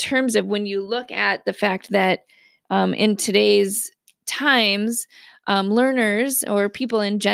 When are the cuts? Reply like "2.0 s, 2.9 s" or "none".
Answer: none